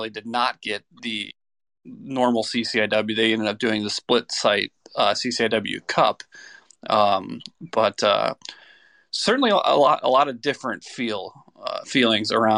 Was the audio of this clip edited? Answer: no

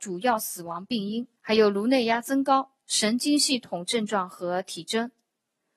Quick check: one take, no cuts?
no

